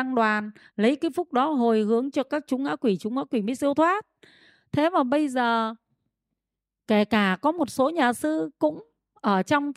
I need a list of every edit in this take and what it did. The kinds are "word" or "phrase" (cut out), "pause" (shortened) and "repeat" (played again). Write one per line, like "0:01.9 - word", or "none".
none